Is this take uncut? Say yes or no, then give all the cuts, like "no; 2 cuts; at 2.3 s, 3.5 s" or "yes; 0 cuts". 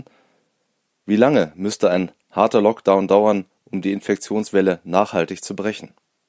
yes; 0 cuts